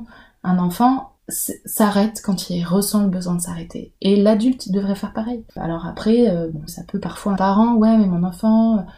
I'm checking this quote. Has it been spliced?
yes; 3 cuts; at 1.2 s, 6.7 s, 7.4 s

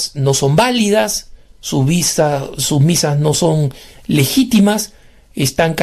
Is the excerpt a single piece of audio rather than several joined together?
yes; 0 cuts

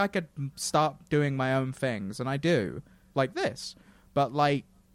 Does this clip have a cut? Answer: no; 0 cuts

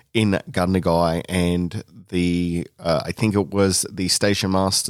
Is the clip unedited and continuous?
yes; 0 cuts

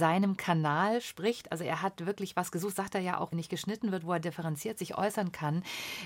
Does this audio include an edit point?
yes; 1 cut; at 3.3 s

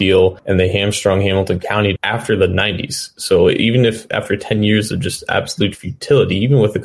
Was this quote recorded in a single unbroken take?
no; 1 cut; at 2.0 s

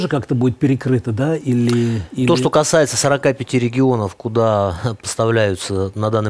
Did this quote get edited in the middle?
no; 0 cuts

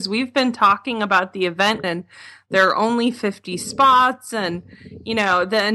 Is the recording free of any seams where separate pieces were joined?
no; 1 cut; at 1.8 s

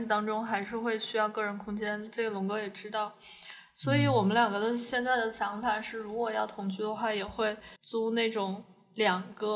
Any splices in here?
yes; 1 cut; at 7.8 s

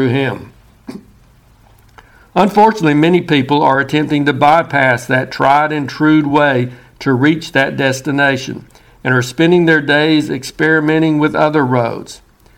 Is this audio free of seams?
yes; 0 cuts

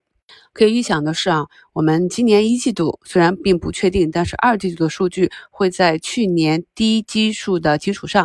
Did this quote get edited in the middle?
no; 0 cuts

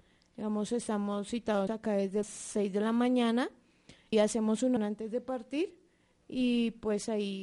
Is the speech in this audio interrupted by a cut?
yes; 4 cuts; at 1.7 s, 2.2 s, 4.1 s, 4.8 s

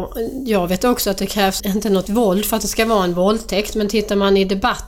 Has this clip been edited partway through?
yes; 2 cuts; at 1.6 s, 2.1 s

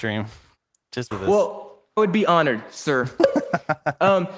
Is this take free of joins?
no; 2 cuts; at 1.1 s, 2.0 s

